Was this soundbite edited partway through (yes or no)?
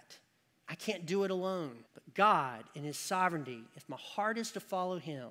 yes